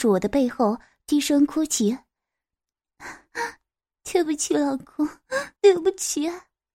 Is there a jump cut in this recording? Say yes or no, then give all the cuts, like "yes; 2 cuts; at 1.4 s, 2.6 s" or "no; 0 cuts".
yes; 1 cut; at 5.6 s